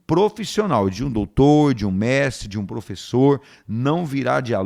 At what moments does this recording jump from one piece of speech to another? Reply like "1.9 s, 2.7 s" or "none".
none